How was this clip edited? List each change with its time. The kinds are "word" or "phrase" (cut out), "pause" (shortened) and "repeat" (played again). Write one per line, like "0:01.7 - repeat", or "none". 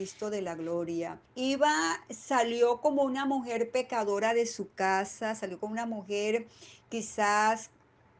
0:01.3 - pause

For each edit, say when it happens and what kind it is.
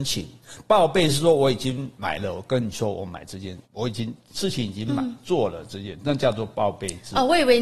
0:03.7 - pause

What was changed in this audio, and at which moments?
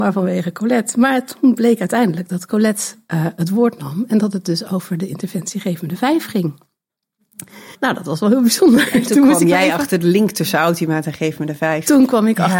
0:07.7 - pause

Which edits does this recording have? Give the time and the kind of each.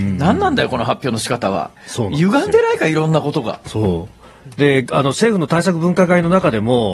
0:01.8 - pause

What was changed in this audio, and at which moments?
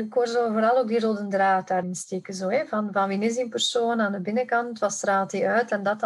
0:01.8 - word

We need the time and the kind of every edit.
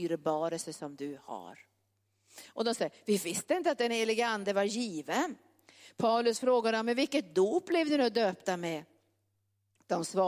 none

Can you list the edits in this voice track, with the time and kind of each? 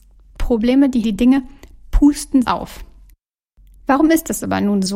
0:01.0 - word
0:02.4 - phrase

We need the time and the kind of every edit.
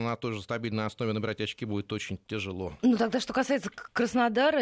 none

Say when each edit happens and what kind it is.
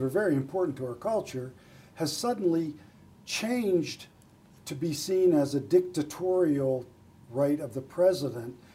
none

